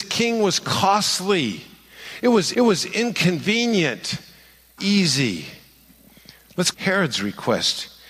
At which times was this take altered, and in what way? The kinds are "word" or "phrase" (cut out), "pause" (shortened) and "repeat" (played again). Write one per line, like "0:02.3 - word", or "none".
0:02.5 - repeat
0:04.8 - phrase
0:06.7 - phrase